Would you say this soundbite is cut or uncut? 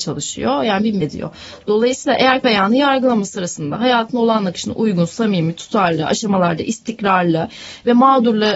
cut